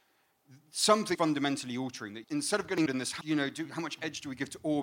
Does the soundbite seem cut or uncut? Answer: cut